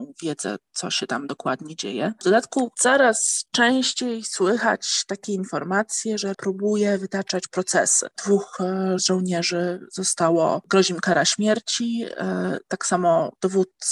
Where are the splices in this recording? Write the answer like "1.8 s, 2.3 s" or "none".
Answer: 6.3 s, 9.0 s